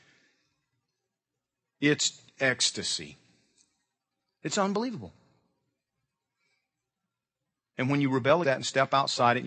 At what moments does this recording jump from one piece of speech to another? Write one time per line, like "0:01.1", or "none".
0:02.3
0:08.4